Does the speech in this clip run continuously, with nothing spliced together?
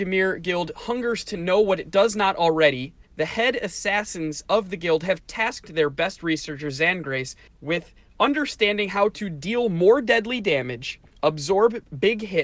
no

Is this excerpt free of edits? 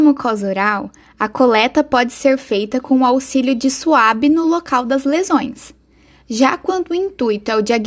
yes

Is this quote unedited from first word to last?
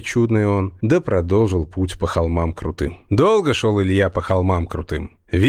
yes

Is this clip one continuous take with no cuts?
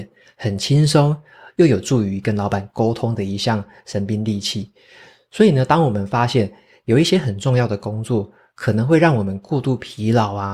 yes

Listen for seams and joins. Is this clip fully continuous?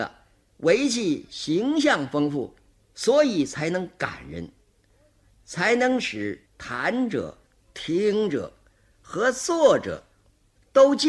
no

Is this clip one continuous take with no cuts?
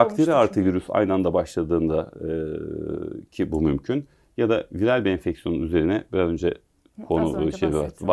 yes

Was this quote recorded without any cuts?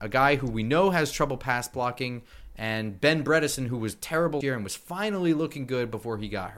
no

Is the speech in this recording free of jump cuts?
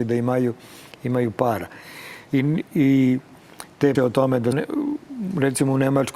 no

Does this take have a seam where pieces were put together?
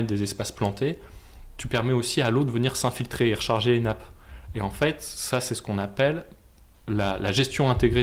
no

